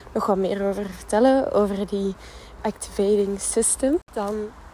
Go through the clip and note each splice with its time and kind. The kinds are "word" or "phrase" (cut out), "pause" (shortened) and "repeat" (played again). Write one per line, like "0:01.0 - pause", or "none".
0:02.6 - word